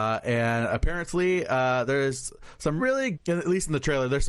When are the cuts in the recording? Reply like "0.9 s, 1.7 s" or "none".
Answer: 2.8 s, 3.1 s